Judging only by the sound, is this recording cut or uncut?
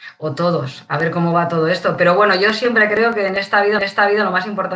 cut